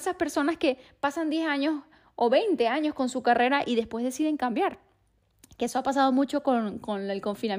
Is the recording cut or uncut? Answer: uncut